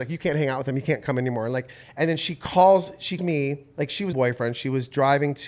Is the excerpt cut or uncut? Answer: cut